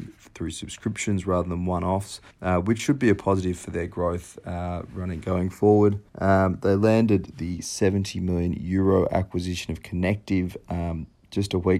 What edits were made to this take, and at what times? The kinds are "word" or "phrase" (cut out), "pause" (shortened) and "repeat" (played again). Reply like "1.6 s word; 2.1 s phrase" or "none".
2.3 s pause; 6.1 s pause

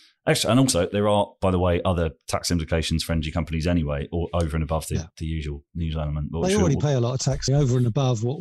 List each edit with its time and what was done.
7.5 s word

